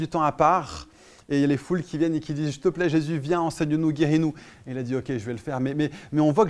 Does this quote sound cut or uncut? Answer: uncut